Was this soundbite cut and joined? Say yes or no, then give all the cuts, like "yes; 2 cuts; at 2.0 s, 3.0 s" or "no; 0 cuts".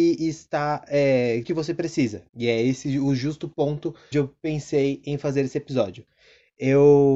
yes; 3 cuts; at 1.4 s, 2.3 s, 4.1 s